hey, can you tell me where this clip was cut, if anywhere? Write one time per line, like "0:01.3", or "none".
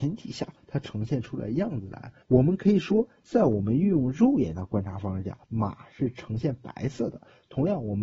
0:02.2
0:05.4